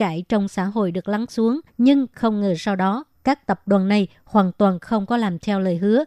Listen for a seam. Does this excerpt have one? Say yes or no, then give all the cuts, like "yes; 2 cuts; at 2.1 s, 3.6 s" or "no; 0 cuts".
yes; 1 cut; at 1.7 s